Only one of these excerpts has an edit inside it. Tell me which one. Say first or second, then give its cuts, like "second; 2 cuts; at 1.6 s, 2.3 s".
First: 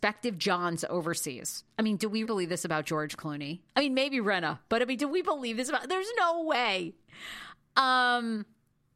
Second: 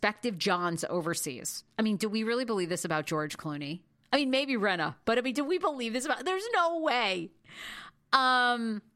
first; 2 cuts; at 2.2 s, 3.7 s